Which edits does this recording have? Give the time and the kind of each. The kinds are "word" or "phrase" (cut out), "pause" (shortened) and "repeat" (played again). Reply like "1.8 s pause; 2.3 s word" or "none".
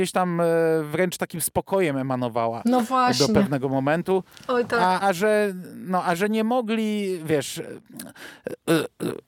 5.0 s word